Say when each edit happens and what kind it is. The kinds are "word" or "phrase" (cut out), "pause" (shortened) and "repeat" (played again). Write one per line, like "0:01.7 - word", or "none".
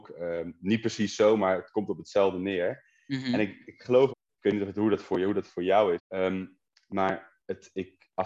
0:04.1 - word
0:06.0 - word